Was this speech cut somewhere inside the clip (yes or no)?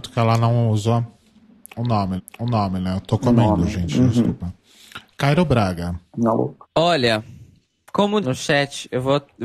yes